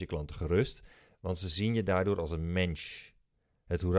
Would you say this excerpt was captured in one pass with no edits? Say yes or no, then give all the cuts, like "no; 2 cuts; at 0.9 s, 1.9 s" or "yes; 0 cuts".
yes; 0 cuts